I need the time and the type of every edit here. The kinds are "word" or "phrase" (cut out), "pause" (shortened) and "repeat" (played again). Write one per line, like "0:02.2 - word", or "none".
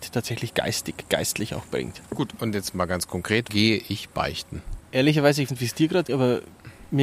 0:02.1 - pause
0:03.5 - word
0:05.5 - word
0:06.1 - word